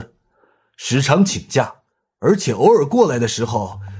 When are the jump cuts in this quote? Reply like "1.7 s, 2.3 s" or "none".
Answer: none